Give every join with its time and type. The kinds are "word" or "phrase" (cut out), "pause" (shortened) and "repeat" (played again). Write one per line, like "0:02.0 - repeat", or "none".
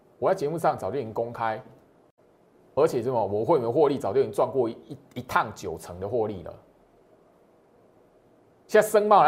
none